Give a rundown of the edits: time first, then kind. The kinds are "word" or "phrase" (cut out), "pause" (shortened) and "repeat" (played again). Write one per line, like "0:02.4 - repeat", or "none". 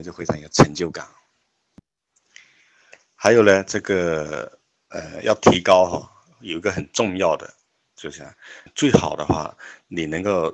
0:08.7 - word